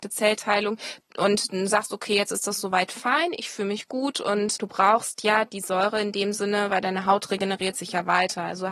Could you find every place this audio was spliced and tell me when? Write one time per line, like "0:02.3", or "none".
0:04.6